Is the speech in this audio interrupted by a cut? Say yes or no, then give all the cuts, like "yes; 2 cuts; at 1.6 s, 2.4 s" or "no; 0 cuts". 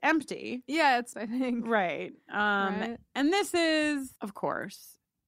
yes; 2 cuts; at 1.1 s, 4.2 s